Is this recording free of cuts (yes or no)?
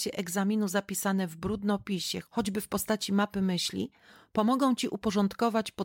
yes